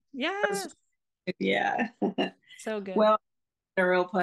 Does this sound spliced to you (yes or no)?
no